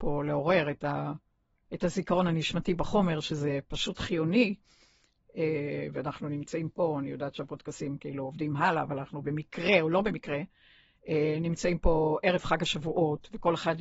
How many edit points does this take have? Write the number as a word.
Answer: zero